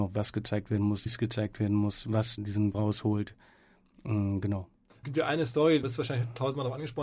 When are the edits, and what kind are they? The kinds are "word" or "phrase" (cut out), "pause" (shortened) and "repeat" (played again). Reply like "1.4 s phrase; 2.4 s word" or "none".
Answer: 1.1 s word; 2.4 s word; 2.7 s word; 5.0 s word; 5.8 s word

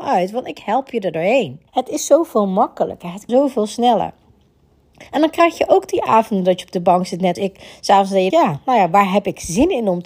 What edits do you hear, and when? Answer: 1.7 s pause; 3.3 s word; 5.1 s pause; 7.4 s word; 8.3 s word

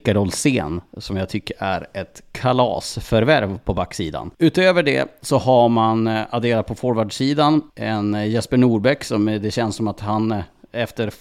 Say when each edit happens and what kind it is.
4.3 s pause; 7.7 s pause

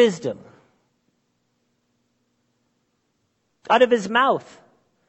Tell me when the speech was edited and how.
none

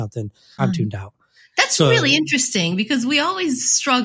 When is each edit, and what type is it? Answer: none

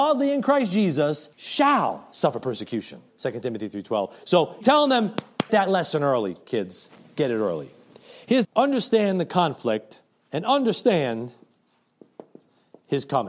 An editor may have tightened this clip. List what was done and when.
1.3 s pause; 3.1 s pause; 4.6 s word; 5.5 s word; 8.4 s phrase; 10.1 s pause

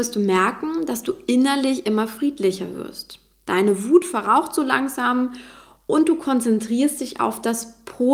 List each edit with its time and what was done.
none

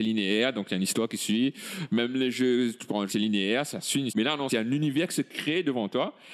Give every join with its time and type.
3.1 s phrase; 4.1 s word; 4.5 s word

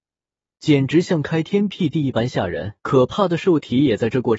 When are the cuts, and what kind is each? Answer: 2.8 s pause

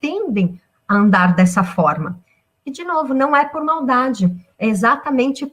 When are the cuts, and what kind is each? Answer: none

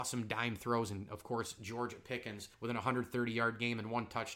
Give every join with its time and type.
2.5 s pause

